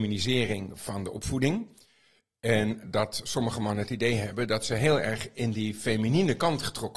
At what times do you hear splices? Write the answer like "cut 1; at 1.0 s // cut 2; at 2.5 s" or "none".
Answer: cut 1; at 2.8 s